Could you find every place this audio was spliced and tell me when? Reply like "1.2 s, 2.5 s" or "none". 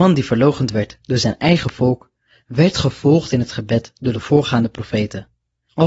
none